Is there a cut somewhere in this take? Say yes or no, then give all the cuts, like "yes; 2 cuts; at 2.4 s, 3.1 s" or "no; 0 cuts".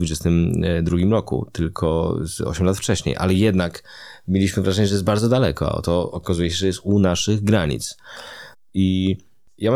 no; 0 cuts